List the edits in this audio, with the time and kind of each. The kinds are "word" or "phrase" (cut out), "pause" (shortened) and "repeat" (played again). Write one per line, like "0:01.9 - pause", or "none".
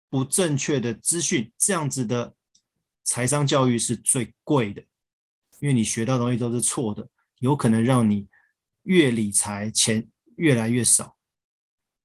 0:01.5 - pause